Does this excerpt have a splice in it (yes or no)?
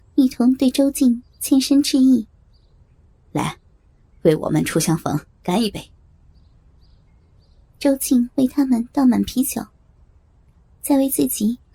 no